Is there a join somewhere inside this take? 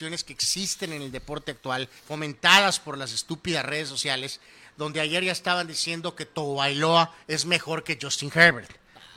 yes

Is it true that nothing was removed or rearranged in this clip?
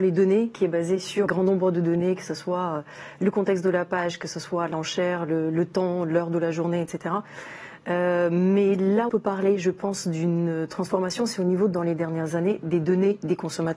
no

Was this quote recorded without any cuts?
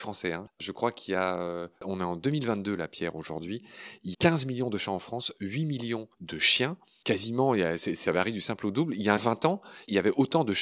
no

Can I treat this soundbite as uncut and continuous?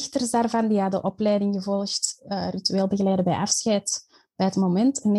yes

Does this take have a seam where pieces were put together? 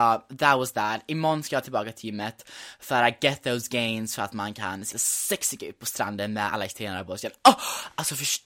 yes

